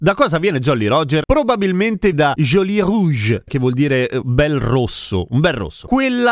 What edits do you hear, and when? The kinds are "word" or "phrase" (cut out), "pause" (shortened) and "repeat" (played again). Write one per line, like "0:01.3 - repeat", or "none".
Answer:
0:02.1 - word
0:03.5 - word